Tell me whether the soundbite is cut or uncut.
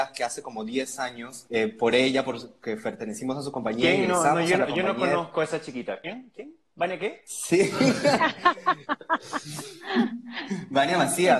uncut